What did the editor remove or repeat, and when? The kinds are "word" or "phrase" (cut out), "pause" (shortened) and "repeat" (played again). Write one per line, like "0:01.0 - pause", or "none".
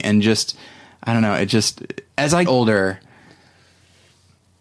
0:02.1 - pause
0:02.5 - word